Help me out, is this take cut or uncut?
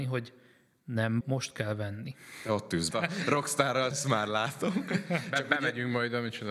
cut